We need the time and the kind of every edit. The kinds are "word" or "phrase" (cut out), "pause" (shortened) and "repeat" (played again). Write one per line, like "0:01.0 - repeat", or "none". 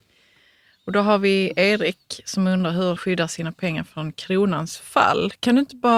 0:03.0 - word

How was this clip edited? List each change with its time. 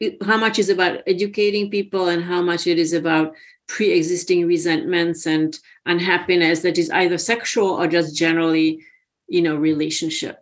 none

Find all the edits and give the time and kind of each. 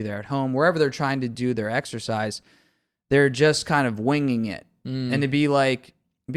none

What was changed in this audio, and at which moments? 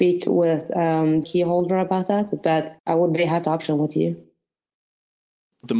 0:01.2 - word
0:02.8 - pause
0:03.4 - phrase

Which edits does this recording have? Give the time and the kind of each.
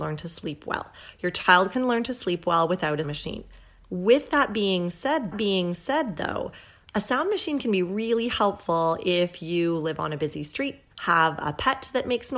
0:03.0 - word
0:05.3 - repeat
0:10.9 - pause

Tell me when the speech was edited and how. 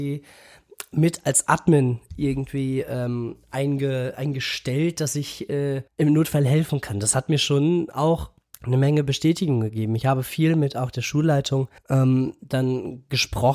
0:05.9 - pause
0:08.4 - pause
0:11.8 - pause

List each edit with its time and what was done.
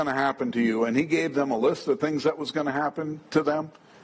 none

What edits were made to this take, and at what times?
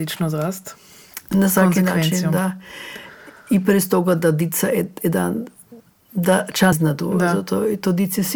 0:05.9 - pause
0:06.7 - word

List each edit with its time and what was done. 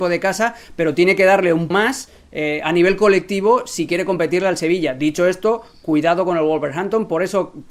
0:01.7 - word

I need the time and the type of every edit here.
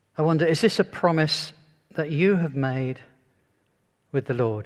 none

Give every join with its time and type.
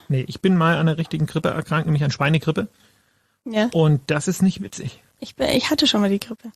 none

